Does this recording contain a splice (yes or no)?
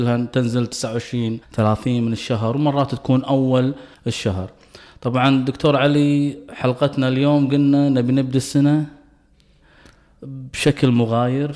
yes